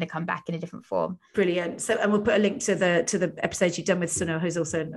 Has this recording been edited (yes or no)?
yes